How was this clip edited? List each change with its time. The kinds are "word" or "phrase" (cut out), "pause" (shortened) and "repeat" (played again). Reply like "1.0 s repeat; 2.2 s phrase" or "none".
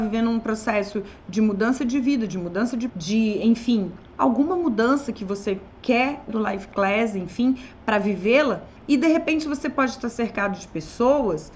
2.9 s word; 5.7 s pause; 6.3 s word; 8.8 s pause